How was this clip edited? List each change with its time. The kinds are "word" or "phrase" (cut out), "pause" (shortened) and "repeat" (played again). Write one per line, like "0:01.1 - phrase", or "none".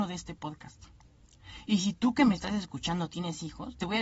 none